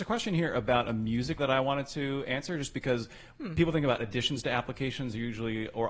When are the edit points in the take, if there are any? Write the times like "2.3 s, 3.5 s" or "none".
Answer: 1.4 s